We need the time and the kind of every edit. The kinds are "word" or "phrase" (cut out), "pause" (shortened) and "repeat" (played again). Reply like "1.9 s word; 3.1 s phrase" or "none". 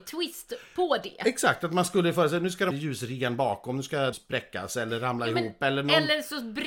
2.7 s word; 4.1 s word